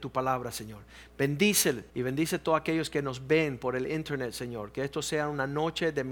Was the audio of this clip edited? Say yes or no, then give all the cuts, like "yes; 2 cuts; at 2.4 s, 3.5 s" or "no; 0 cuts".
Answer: yes; 1 cut; at 1.9 s